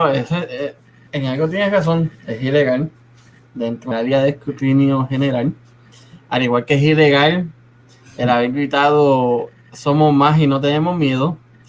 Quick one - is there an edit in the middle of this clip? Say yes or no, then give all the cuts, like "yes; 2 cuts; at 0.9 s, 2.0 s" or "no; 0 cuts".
yes; 1 cut; at 3.9 s